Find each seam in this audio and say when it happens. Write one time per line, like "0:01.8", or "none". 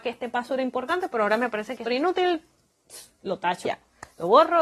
0:01.9
0:03.7